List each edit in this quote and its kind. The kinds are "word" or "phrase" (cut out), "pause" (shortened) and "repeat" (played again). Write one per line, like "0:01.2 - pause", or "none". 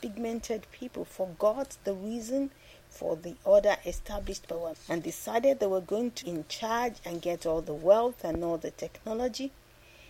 0:04.7 - word
0:06.2 - word